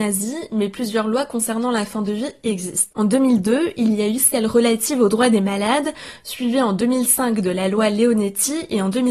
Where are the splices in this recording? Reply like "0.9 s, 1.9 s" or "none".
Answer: none